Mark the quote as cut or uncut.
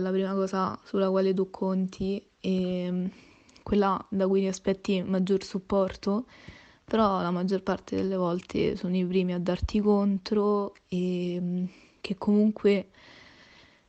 uncut